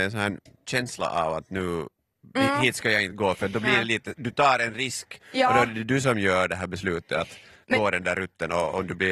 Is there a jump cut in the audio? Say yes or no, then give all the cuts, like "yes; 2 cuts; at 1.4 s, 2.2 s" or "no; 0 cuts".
no; 0 cuts